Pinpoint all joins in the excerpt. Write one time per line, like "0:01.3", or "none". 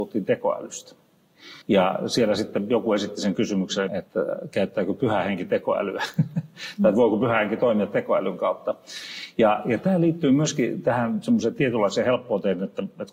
0:01.6
0:03.9